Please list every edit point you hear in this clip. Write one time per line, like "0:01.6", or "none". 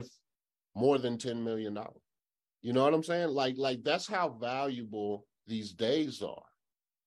0:02.4